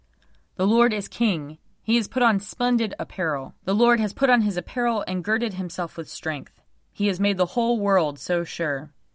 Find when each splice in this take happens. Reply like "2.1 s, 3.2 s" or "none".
3.6 s